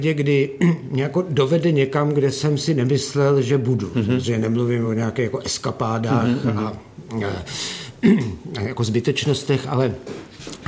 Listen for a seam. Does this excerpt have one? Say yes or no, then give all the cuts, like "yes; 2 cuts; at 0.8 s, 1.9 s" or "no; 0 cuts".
no; 0 cuts